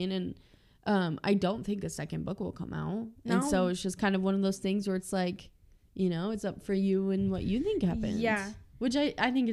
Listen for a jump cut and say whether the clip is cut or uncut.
uncut